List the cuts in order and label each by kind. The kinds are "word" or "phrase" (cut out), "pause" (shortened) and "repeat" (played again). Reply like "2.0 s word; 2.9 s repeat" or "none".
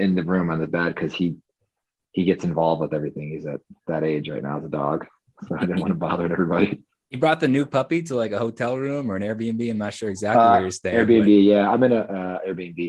none